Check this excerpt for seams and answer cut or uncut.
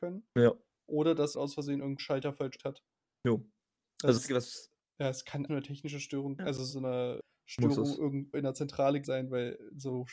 cut